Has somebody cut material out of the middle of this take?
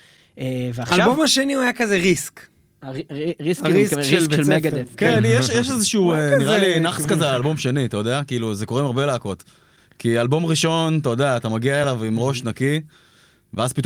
no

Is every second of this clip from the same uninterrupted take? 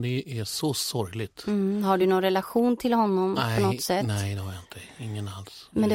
yes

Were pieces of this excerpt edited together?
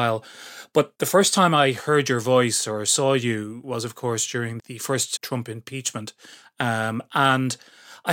yes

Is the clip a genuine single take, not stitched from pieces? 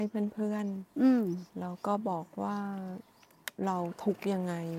yes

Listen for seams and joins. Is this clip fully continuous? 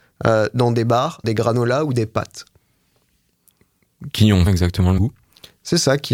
no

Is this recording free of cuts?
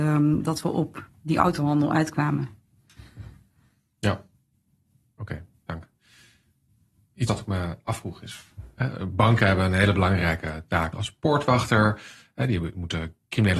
no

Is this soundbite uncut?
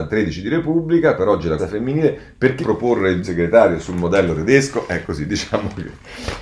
no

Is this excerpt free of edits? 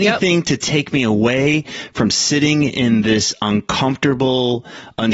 yes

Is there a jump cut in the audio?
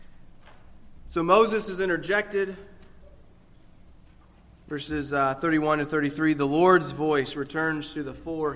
no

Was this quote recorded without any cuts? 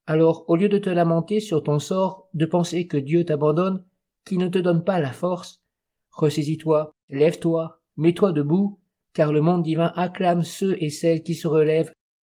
yes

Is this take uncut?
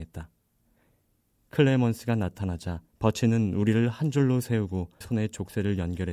no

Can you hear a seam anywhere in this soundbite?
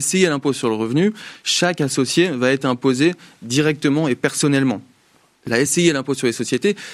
no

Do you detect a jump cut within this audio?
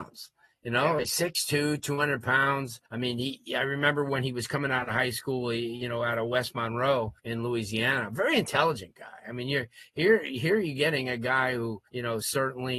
yes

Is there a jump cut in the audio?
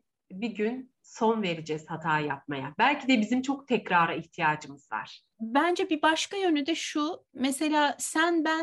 no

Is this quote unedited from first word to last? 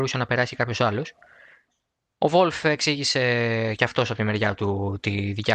yes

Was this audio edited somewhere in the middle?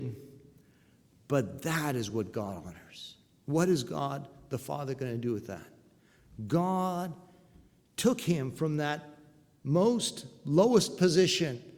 no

